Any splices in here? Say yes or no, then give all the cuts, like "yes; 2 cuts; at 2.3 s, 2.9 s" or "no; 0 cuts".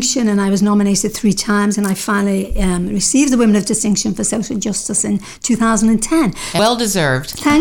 yes; 1 cut; at 6.6 s